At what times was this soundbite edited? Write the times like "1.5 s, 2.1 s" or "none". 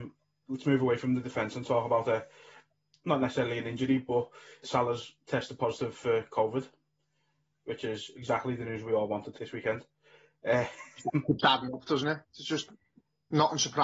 4.6 s, 9.4 s